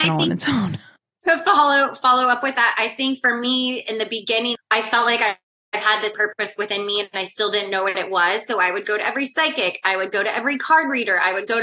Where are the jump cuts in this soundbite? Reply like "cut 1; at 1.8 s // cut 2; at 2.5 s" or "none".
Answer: cut 1; at 4.6 s // cut 2; at 6.1 s

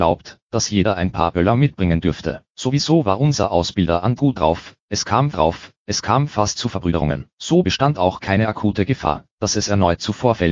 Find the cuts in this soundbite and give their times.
cut 1; at 2.5 s // cut 2; at 4.2 s // cut 3; at 5.3 s // cut 4; at 7.3 s

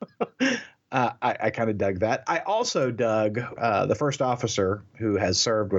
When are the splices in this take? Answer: cut 1; at 3.6 s

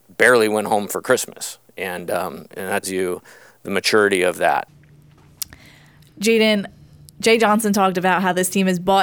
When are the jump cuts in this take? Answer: cut 1; at 2.8 s

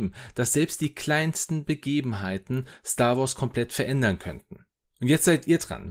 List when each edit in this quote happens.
cut 1; at 4.7 s

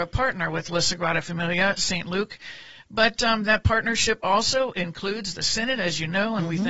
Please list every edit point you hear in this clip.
none

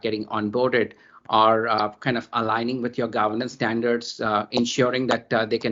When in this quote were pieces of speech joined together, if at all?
none

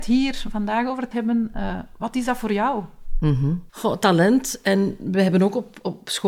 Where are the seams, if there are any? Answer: cut 1; at 1.1 s // cut 2; at 3.7 s

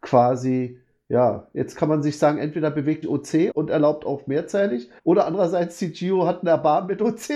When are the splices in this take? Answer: cut 1; at 1.7 s // cut 2; at 3.0 s // cut 3; at 3.5 s // cut 4; at 5.0 s

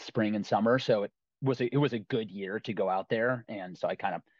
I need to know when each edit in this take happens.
none

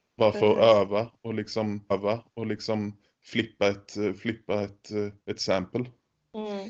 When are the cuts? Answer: cut 1; at 1.9 s // cut 2; at 5.2 s

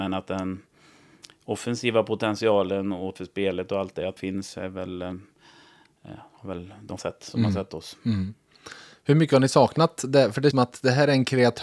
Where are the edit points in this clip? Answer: cut 1; at 3.1 s // cut 2; at 4.2 s // cut 3; at 7.0 s // cut 4; at 10.5 s

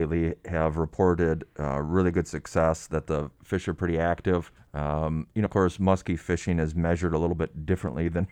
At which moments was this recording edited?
cut 1; at 4.6 s // cut 2; at 5.5 s

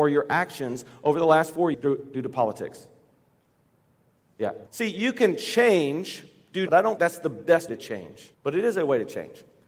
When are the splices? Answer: cut 1; at 1.7 s // cut 2; at 4.7 s // cut 3; at 6.7 s // cut 4; at 7.0 s // cut 5; at 7.7 s // cut 6; at 8.3 s

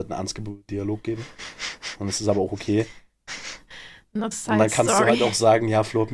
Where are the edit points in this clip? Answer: cut 1; at 4.3 s

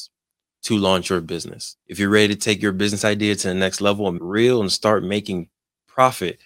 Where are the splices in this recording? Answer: cut 1; at 1.8 s // cut 2; at 4.2 s

